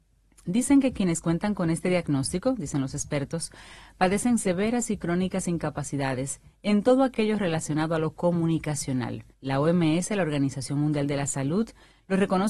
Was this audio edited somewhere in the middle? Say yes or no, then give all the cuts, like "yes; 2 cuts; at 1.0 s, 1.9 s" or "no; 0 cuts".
yes; 1 cut; at 9.3 s